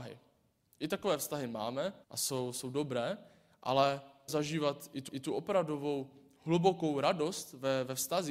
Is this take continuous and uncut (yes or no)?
no